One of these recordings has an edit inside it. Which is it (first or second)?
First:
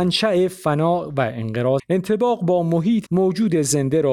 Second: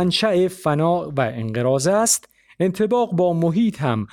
first